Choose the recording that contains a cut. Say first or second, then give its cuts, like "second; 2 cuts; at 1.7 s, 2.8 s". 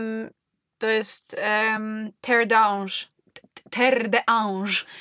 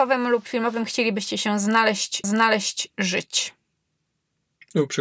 second; 1 cut; at 2.2 s